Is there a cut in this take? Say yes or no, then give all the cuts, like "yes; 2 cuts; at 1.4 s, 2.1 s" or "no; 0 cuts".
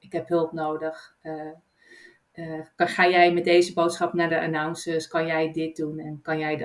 no; 0 cuts